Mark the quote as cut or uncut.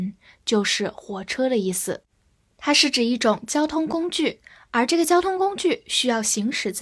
uncut